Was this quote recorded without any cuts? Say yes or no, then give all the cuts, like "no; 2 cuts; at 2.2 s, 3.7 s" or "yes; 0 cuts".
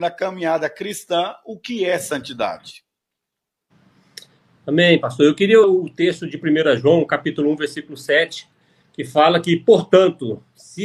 no; 1 cut; at 5.6 s